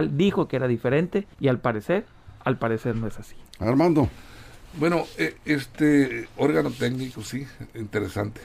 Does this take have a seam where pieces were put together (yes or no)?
yes